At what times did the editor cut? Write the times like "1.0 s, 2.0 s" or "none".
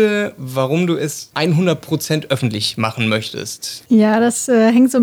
1.3 s

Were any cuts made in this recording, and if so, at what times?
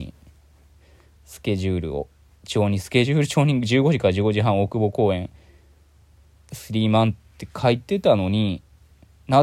none

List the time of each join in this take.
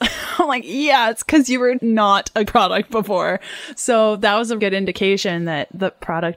1.8 s, 2.5 s, 4.6 s

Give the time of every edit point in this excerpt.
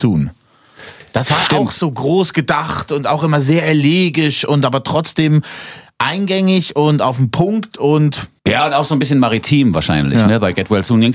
8.4 s

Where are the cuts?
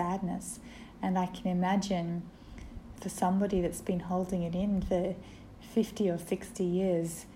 3.0 s, 5.6 s

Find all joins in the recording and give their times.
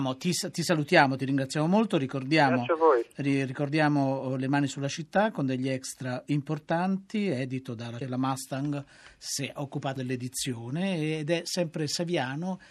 6.3 s, 8.0 s, 10.0 s

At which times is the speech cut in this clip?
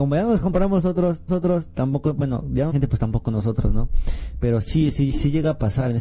1.3 s, 2.7 s

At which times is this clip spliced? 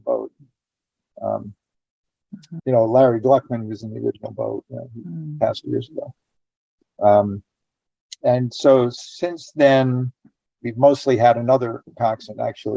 5.6 s, 8.2 s

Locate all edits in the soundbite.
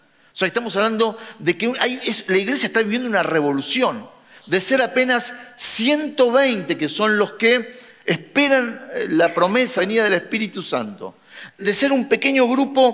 9.8 s, 11.6 s

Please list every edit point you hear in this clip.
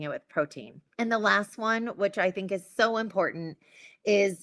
0.9 s

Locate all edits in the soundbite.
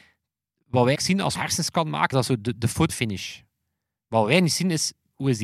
1.0 s, 1.4 s, 2.1 s, 2.6 s, 2.9 s

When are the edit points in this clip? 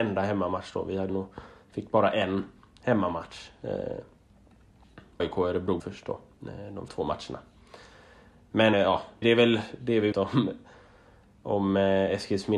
1.1 s, 5.2 s, 5.8 s, 6.9 s, 8.7 s, 9.2 s, 10.1 s

